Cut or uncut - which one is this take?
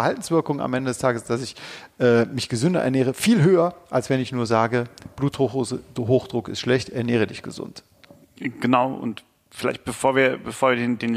uncut